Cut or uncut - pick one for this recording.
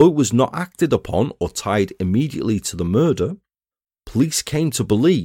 uncut